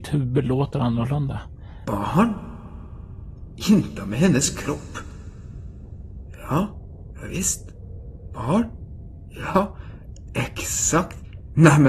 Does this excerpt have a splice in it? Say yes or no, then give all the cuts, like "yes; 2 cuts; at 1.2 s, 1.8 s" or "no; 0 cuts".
no; 0 cuts